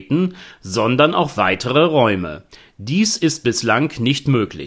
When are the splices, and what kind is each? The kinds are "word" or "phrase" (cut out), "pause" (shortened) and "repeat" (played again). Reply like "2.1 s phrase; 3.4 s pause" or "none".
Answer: none

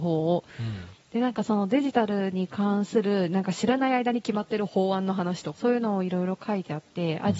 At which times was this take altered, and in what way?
5.5 s phrase

